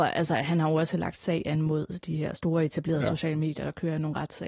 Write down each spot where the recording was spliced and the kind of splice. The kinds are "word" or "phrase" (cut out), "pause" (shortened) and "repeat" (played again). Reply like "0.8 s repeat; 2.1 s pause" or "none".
none